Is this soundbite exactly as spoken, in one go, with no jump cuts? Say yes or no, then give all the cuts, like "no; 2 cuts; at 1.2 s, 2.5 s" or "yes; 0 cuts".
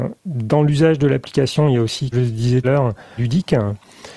no; 3 cuts; at 2.1 s, 2.6 s, 3.2 s